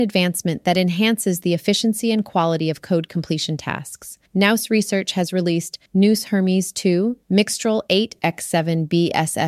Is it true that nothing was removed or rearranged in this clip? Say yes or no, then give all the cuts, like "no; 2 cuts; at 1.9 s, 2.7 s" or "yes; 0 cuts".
no; 3 cuts; at 4.3 s, 5.9 s, 7.2 s